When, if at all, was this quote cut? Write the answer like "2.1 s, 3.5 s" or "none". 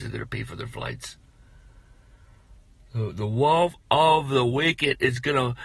none